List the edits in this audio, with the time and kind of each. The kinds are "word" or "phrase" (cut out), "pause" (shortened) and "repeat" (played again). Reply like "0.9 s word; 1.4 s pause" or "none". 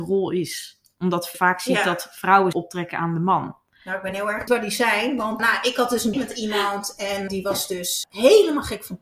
1.3 s word; 2.5 s word; 4.5 s word; 5.4 s word; 6.1 s word; 7.3 s word; 8.0 s word

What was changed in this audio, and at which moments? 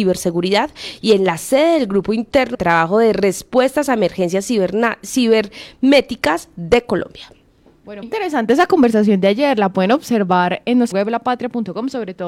2.5 s word; 8.0 s word; 10.9 s word

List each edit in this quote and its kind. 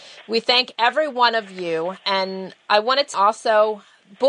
3.1 s word

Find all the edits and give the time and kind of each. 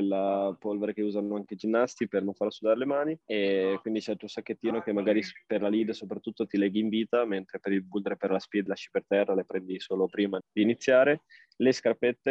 3.2 s pause; 8.7 s word; 10.4 s word

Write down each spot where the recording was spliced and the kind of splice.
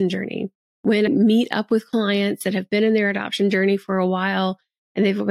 1.1 s word

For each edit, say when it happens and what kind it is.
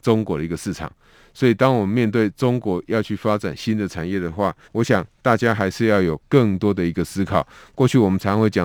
4.6 s pause

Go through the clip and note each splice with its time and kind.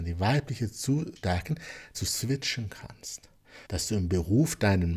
1.2 s word; 1.9 s word; 3.7 s pause

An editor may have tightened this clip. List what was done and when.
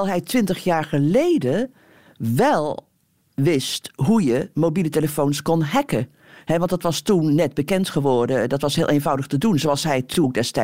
none

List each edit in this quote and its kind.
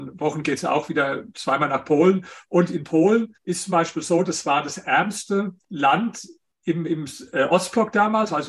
3.3 s pause; 5.6 s pause

